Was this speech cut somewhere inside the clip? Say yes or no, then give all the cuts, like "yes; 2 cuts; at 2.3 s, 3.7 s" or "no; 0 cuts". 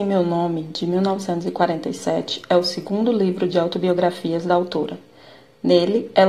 no; 0 cuts